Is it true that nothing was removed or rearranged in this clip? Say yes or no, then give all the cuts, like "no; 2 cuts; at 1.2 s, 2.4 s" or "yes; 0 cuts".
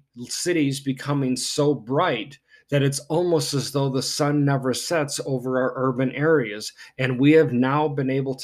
yes; 0 cuts